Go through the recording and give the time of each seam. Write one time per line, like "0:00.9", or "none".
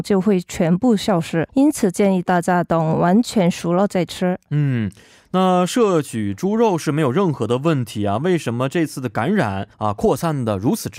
0:01.5
0:09.7